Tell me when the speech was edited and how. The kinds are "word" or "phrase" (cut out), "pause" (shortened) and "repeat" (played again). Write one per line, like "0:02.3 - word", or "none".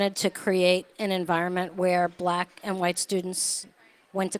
none